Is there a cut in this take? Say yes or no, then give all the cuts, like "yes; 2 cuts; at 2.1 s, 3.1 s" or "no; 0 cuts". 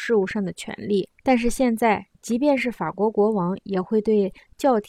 yes; 1 cut; at 1.2 s